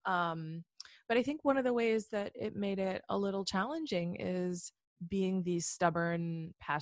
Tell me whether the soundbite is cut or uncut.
uncut